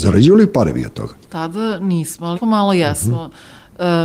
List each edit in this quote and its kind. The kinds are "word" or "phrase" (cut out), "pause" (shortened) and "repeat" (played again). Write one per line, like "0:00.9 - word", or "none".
0:01.2 - pause
0:02.3 - word